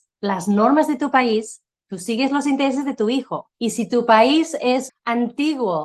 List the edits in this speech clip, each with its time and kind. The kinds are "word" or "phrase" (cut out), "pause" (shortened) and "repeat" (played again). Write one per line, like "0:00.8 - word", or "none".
0:03.5 - pause
0:04.9 - word